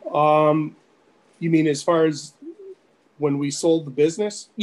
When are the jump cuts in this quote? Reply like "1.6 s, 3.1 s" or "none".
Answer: none